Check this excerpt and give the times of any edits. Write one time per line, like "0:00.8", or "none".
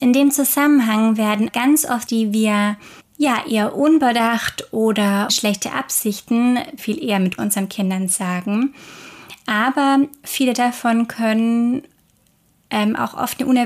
0:01.5
0:02.1
0:03.0
0:05.3
0:06.8
0:07.4